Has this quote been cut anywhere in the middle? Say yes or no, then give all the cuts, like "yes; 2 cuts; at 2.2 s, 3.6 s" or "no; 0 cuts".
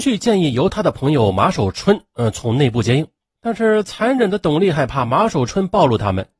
no; 0 cuts